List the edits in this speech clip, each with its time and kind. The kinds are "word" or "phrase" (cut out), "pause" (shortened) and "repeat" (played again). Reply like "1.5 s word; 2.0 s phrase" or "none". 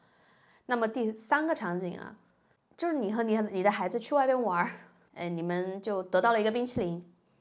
none